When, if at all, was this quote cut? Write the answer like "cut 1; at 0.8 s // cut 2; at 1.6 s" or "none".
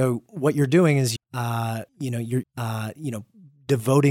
cut 1; at 1.2 s // cut 2; at 1.9 s // cut 3; at 2.4 s